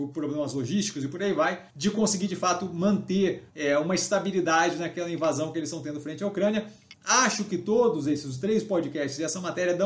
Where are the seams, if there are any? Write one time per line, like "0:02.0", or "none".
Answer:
0:01.7
0:03.5